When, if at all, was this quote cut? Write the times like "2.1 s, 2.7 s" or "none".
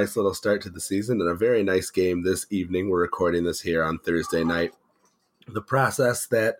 none